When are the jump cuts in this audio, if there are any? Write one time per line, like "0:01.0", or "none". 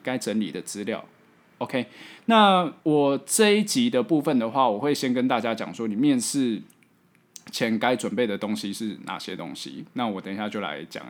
0:02.8

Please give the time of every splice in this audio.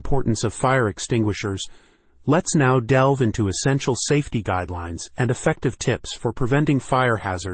none

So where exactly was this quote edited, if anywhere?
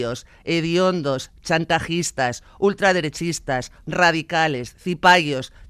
0:03.8

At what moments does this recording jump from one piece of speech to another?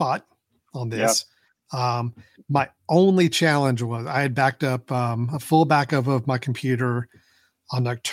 none

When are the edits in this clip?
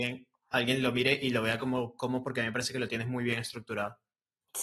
none

